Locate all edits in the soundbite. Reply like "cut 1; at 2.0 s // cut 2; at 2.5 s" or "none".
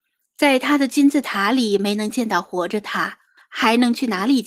cut 1; at 3.4 s